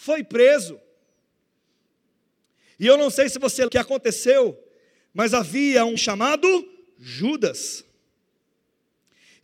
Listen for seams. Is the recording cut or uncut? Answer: cut